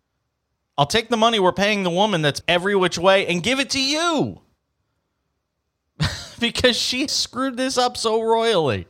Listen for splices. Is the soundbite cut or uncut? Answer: cut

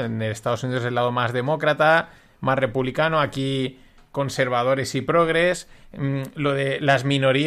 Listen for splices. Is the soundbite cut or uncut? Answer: uncut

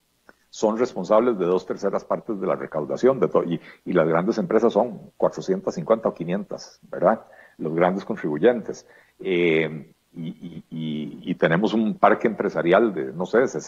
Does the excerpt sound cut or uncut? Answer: uncut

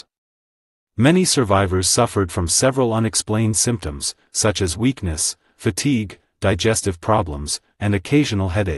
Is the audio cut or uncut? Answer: uncut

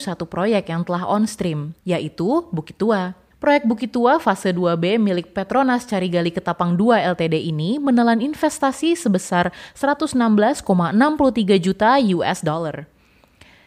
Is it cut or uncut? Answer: cut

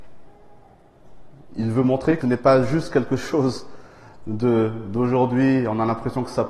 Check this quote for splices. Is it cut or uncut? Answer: cut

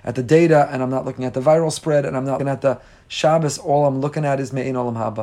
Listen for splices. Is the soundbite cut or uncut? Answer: cut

